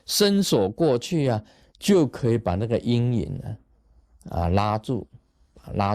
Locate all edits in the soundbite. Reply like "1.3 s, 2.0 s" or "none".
none